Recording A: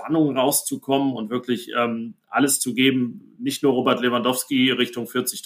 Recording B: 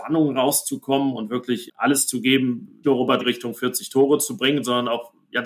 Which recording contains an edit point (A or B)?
B